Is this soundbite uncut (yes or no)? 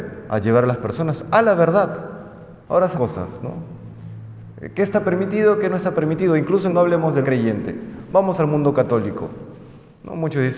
no